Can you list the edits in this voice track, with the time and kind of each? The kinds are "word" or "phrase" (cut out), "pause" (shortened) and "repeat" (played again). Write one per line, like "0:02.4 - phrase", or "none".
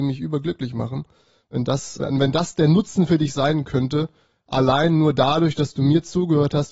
0:02.0 - word